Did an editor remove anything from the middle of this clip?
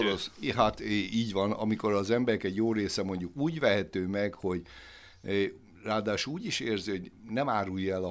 no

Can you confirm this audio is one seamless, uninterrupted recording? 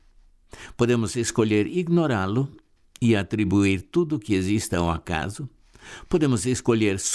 yes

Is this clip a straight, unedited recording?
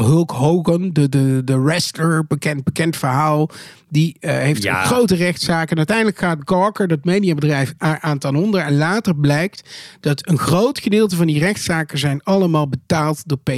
yes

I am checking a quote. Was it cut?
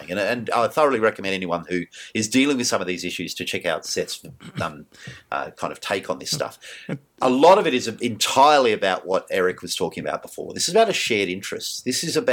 no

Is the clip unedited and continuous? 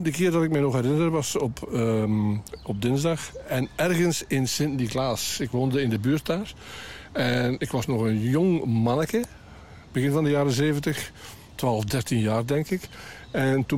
yes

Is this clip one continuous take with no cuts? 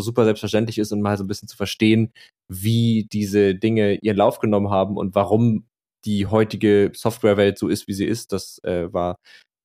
yes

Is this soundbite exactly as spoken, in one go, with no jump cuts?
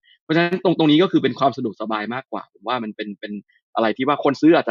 yes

